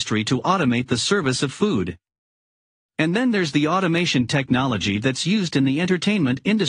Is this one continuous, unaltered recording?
yes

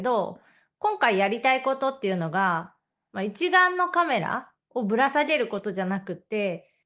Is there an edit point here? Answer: no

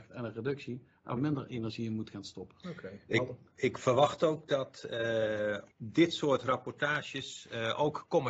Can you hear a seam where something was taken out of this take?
yes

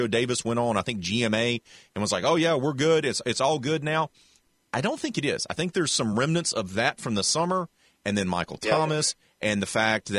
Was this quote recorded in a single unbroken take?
yes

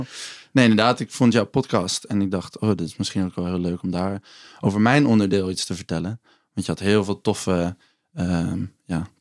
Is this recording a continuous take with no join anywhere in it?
yes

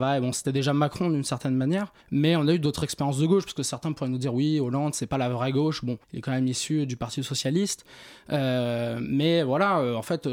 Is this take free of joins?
no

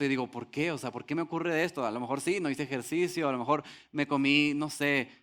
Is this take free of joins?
yes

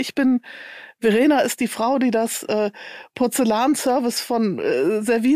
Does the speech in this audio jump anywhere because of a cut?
no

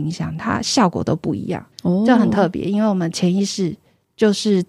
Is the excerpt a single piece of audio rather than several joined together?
no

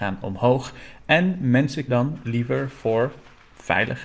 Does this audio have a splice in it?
yes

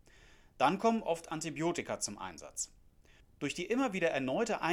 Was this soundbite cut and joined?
no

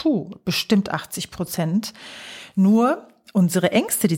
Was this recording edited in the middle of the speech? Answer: no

